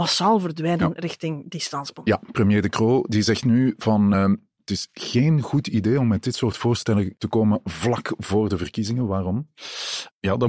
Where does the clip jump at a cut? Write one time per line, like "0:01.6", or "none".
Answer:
none